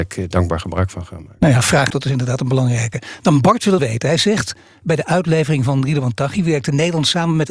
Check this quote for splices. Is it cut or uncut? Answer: cut